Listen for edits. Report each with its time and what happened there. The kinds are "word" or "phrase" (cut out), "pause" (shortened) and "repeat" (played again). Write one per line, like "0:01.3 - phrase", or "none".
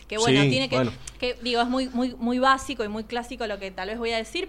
none

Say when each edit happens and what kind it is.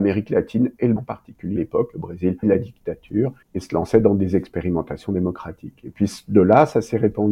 0:01.0 - word
0:01.6 - word
0:02.4 - word
0:03.4 - pause

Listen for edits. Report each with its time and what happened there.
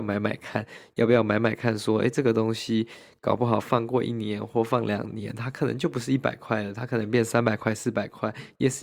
none

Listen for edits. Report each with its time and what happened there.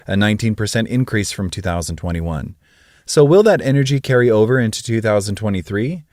none

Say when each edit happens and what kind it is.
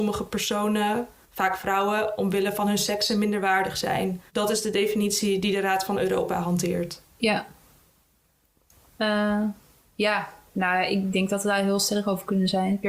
0:04.3 - pause

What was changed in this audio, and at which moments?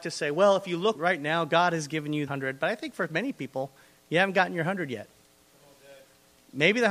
0:00.9 - word
0:02.3 - word

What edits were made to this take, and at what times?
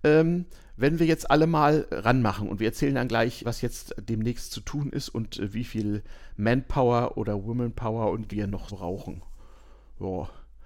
0:03.4 - word
0:08.3 - word
0:08.7 - word

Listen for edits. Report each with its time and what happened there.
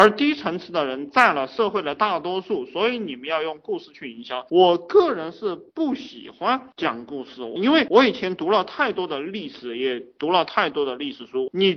0:05.7 - pause

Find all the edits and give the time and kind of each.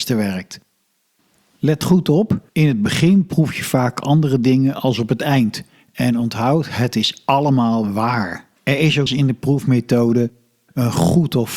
0:02.5 - pause
0:08.6 - pause
0:09.1 - word

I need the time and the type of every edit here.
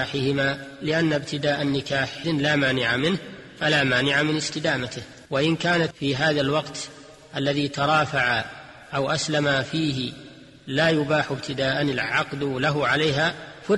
0:02.2 - word
0:05.3 - pause
0:05.9 - word

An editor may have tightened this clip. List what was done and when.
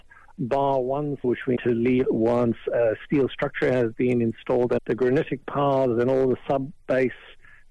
0:01.2 - word
0:01.6 - word
0:02.0 - word
0:04.8 - word

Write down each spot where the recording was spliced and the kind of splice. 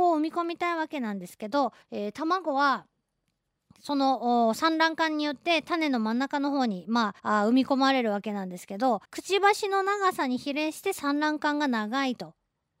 0:01.8 - pause
0:07.2 - pause
0:09.0 - pause

